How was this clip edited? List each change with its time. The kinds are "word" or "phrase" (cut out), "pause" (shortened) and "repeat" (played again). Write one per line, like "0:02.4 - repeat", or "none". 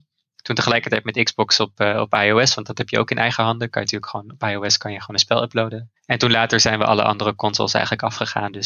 0:06.0 - pause